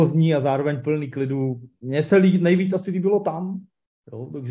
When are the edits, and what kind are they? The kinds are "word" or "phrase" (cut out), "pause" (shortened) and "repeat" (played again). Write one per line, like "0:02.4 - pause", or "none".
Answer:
none